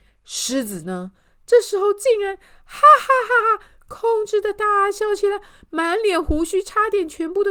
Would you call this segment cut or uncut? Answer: uncut